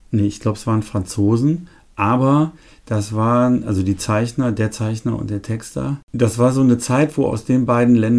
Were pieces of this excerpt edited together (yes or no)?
no